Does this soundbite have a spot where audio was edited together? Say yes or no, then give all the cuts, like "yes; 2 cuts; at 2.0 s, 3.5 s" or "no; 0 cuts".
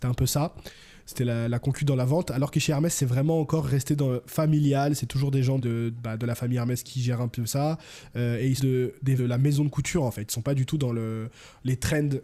yes; 4 cuts; at 5.6 s, 6.8 s, 8.6 s, 9.2 s